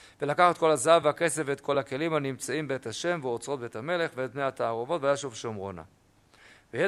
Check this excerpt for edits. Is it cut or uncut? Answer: uncut